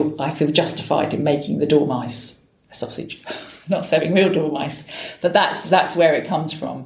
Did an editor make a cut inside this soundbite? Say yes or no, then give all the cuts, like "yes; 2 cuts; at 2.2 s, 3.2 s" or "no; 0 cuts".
no; 0 cuts